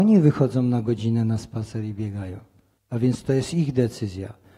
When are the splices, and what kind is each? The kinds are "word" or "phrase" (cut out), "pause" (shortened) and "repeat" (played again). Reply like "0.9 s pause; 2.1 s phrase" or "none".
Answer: none